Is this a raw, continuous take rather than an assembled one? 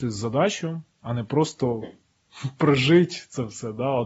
no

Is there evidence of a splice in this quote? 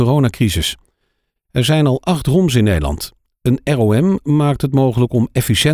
no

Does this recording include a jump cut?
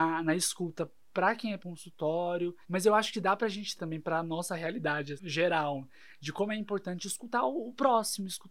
yes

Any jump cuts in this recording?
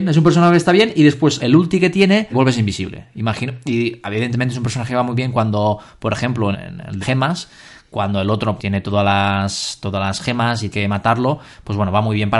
yes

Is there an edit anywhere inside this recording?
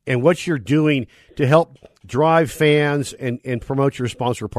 no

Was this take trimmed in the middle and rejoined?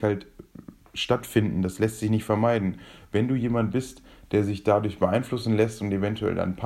no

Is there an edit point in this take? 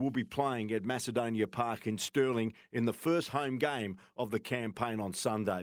no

